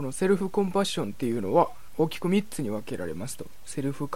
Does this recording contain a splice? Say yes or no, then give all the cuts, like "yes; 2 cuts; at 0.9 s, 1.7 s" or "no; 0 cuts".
no; 0 cuts